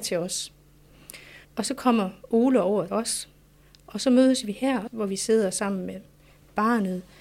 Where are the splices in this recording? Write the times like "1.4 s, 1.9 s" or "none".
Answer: 1.4 s, 2.9 s